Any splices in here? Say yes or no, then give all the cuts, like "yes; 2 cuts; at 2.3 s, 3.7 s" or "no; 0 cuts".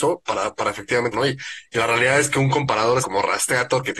yes; 2 cuts; at 1.1 s, 3.0 s